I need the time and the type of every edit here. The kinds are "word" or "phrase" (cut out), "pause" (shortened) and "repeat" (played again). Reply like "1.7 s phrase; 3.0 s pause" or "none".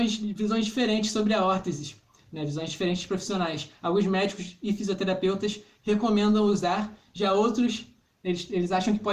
none